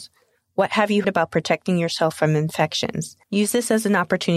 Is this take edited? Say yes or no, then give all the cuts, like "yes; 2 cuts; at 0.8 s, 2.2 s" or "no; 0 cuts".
yes; 2 cuts; at 1.0 s, 3.2 s